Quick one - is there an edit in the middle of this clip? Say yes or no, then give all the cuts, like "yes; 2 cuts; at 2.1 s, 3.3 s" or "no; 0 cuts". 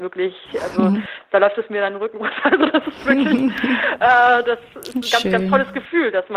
no; 0 cuts